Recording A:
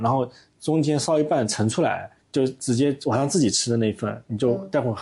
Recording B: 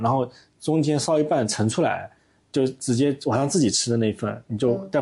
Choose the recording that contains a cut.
A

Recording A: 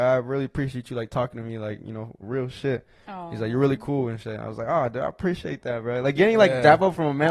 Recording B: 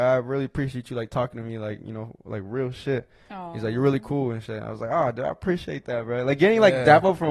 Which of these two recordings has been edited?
A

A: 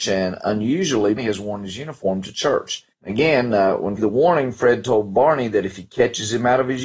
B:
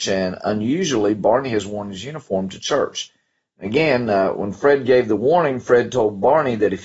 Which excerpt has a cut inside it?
A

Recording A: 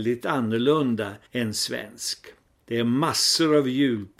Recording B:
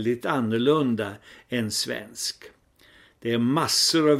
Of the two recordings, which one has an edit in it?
A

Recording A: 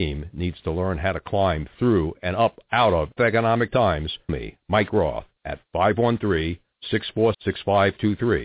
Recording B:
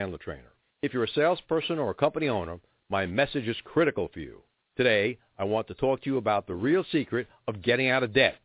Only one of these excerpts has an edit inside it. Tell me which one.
A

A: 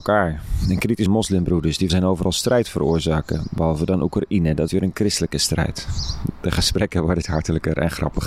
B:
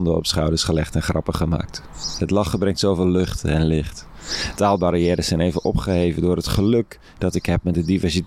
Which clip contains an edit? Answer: A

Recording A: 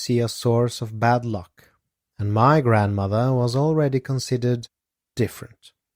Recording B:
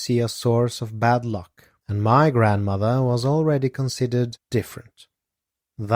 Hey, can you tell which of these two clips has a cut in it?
B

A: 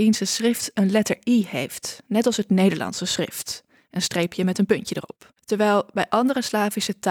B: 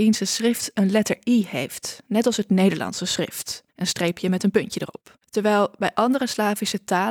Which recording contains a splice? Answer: B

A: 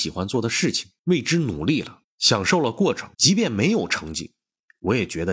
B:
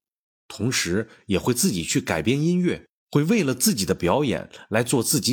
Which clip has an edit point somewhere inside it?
A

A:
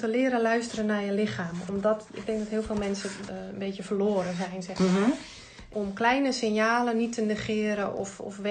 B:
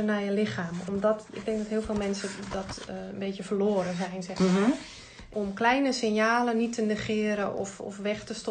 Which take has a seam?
A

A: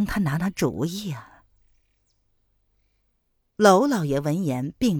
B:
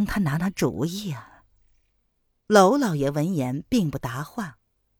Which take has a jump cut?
B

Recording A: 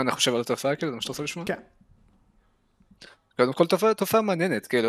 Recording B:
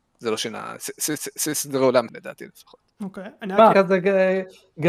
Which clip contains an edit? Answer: B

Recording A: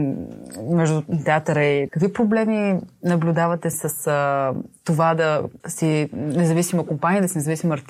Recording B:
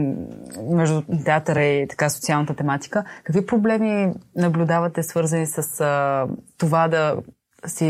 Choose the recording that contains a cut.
A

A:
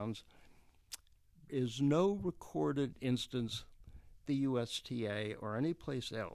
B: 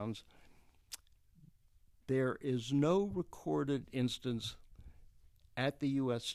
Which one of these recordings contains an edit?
A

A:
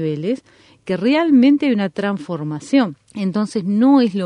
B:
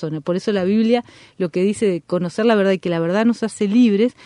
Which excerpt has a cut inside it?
A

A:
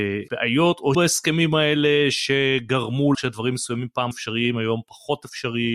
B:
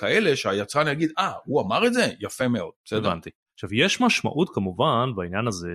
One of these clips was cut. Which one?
A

